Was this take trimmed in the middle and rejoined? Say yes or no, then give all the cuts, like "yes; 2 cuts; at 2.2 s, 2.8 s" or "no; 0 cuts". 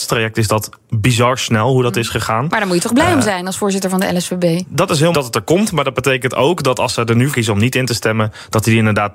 yes; 2 cuts; at 5.1 s, 7.3 s